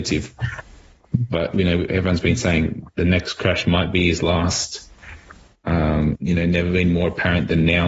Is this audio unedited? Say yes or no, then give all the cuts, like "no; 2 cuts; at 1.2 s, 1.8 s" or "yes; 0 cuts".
no; 1 cut; at 6.2 s